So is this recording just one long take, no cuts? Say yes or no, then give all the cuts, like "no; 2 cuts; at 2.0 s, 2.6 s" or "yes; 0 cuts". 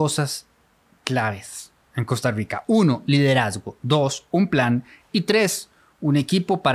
yes; 0 cuts